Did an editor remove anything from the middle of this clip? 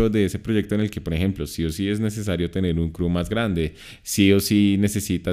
no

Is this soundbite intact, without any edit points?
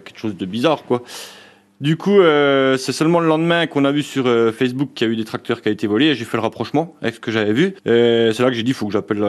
yes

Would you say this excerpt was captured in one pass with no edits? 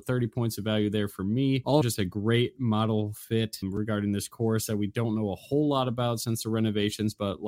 no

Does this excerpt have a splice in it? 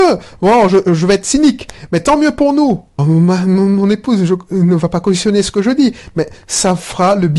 yes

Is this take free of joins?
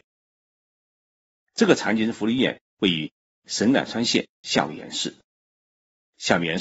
yes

